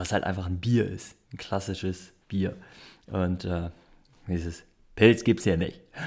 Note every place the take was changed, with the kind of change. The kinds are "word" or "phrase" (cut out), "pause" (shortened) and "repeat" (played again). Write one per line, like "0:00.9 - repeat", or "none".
0:01.2 - pause
0:02.2 - pause